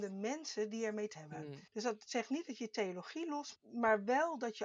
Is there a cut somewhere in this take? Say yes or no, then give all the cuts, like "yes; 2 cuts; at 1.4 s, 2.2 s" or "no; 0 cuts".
yes; 3 cuts; at 1.1 s, 1.7 s, 3.5 s